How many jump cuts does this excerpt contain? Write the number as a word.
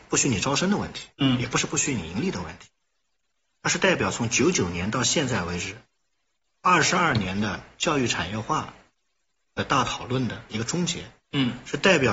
zero